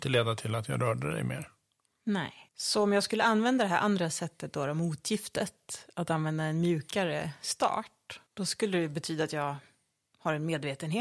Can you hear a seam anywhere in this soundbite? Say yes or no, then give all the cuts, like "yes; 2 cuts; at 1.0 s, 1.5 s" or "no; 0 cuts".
yes; 2 cuts; at 2.5 s, 8.3 s